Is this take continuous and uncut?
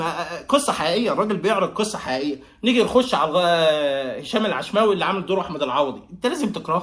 yes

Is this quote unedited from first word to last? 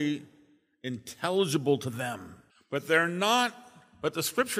no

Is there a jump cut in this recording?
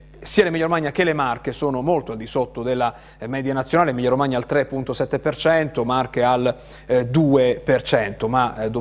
no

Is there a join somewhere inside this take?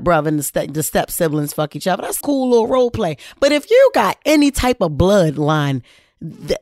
yes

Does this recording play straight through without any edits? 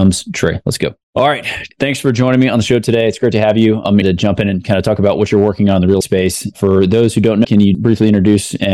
no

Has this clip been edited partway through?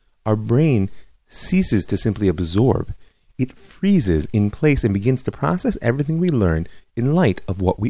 no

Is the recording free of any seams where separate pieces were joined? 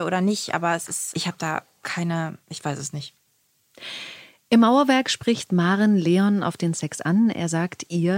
yes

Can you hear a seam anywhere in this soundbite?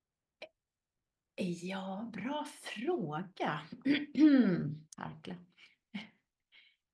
yes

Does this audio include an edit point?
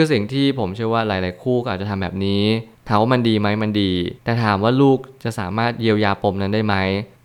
yes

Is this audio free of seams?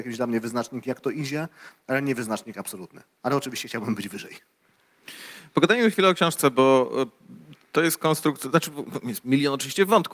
yes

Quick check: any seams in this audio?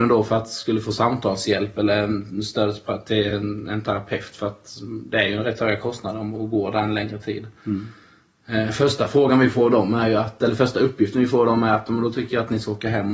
no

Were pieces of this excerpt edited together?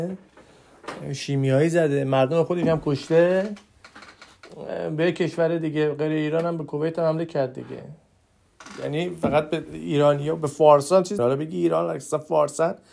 yes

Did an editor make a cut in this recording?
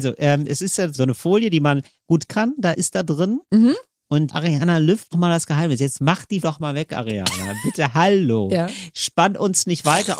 yes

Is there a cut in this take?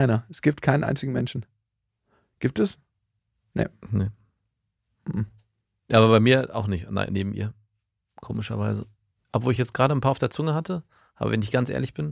no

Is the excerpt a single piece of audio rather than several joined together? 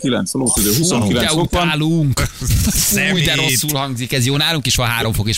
yes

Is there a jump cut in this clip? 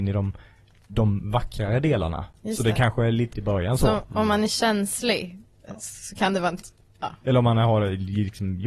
yes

